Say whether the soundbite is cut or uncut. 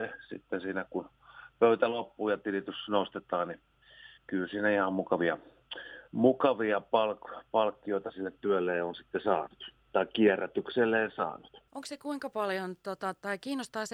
cut